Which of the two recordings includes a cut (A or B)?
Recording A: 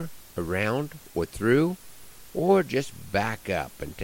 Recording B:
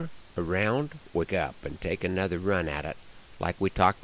B